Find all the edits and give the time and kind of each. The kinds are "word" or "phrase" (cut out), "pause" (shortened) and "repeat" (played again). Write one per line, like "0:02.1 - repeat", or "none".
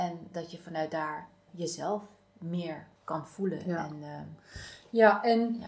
0:01.5 - word
0:03.0 - pause